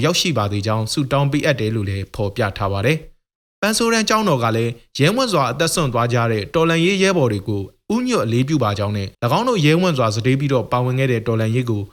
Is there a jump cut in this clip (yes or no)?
yes